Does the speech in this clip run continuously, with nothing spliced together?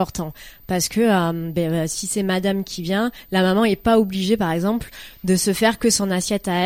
yes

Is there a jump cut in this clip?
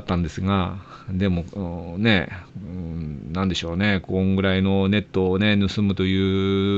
yes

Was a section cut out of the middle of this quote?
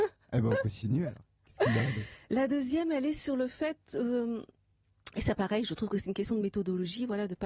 no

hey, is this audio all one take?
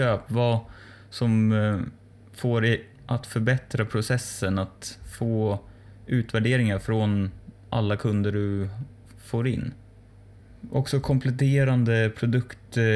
yes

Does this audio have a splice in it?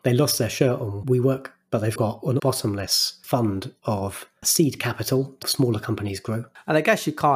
yes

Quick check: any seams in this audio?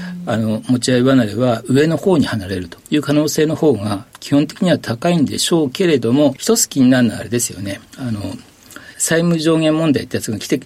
yes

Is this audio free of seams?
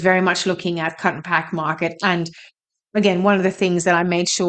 yes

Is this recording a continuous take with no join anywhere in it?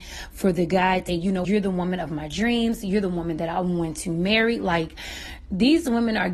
no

